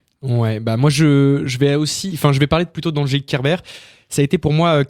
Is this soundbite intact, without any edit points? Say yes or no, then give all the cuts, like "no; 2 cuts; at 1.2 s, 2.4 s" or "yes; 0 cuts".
yes; 0 cuts